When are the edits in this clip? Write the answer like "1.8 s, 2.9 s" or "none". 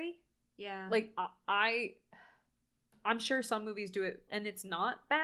4.3 s